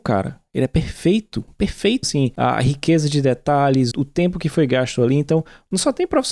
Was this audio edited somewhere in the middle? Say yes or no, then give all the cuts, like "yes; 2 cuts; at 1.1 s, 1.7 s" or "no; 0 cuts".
yes; 2 cuts; at 2.0 s, 3.9 s